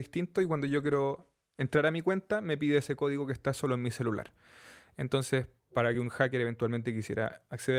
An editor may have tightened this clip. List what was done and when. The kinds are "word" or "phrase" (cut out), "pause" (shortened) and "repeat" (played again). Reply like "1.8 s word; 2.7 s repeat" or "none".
none